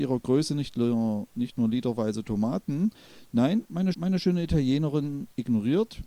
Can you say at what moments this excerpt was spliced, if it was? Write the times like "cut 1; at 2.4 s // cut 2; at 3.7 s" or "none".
cut 1; at 3.9 s